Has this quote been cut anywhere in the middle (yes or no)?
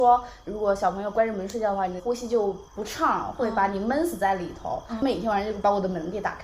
yes